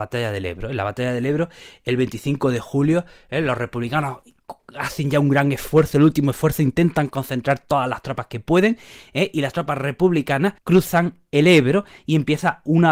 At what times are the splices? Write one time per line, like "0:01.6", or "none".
0:10.6